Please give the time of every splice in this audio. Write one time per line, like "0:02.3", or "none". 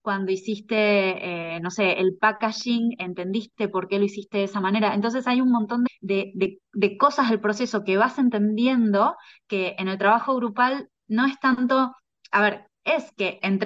0:05.9